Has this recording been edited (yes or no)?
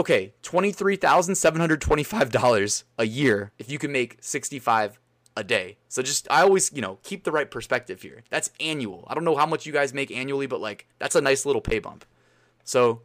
yes